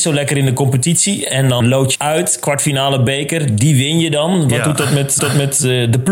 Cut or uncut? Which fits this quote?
cut